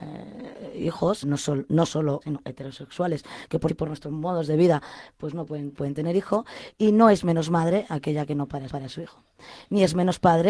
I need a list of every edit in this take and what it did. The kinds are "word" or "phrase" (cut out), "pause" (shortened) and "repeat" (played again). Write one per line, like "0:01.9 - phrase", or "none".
0:01.2 - word
0:02.2 - word
0:03.7 - word
0:05.8 - word
0:08.7 - repeat